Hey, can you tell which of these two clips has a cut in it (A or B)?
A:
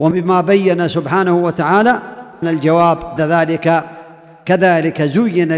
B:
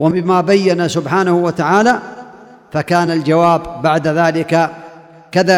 A